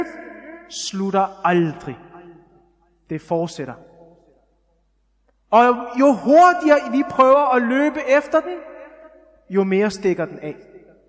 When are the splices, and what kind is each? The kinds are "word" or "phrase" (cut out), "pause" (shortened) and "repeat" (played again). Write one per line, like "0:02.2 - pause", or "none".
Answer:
none